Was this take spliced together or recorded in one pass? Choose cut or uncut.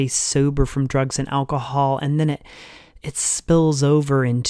uncut